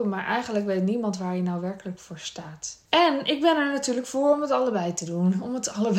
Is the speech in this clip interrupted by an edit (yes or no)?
yes